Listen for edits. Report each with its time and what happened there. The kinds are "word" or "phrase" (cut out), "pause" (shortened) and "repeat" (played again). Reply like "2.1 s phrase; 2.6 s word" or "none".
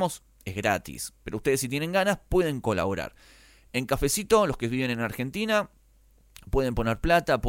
none